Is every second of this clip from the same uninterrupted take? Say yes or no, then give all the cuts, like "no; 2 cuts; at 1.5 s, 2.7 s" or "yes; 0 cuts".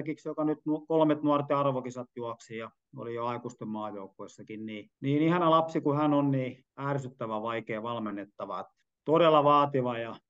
no; 3 cuts; at 5.0 s, 6.7 s, 8.9 s